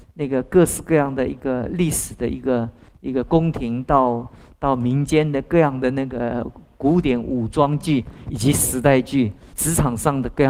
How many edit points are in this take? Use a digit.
1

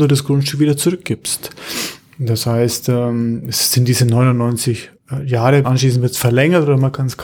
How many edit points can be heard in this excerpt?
1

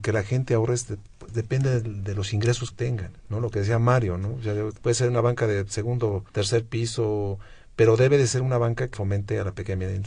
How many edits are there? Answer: 6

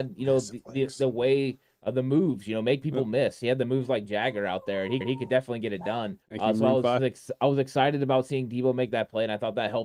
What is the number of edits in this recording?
3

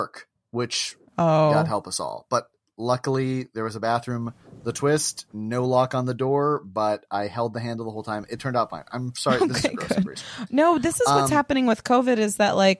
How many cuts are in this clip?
0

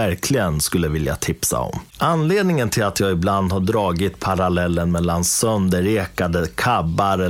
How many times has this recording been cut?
1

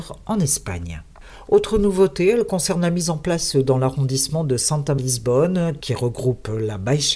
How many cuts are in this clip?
1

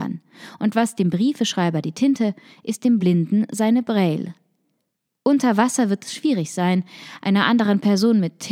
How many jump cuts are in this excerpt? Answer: 0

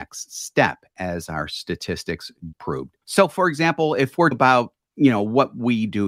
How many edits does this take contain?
3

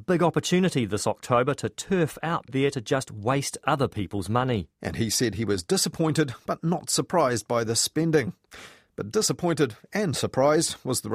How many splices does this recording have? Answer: 1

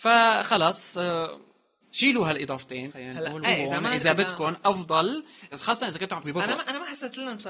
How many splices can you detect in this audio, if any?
5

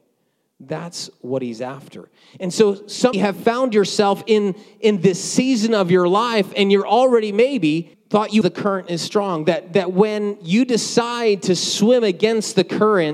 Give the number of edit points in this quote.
3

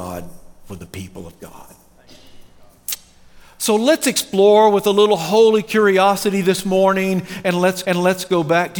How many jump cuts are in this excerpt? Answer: 1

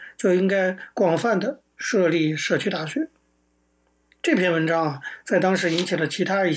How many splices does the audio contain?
0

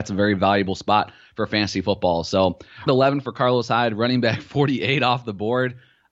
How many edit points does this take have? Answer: 1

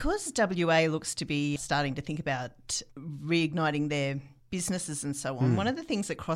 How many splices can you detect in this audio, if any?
2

